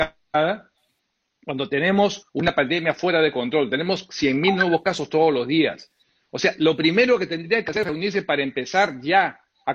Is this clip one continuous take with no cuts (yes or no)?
yes